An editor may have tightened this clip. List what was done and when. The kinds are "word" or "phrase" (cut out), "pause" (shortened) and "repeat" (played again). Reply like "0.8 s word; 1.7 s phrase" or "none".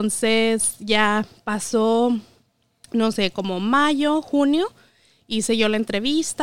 none

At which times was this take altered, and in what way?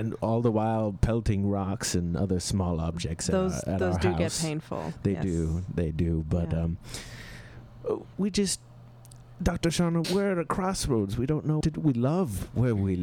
8.1 s word; 10.0 s word; 11.6 s word

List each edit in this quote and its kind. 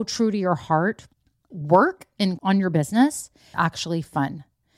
1.5 s word; 2.4 s word; 3.5 s word

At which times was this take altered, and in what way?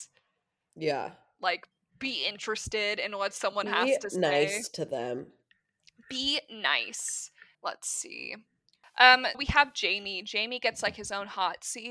7.5 s word; 9.3 s word

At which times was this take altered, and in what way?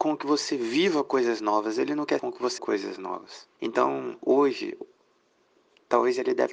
2.2 s word; 2.6 s word; 3.5 s pause

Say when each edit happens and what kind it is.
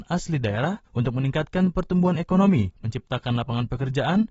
none

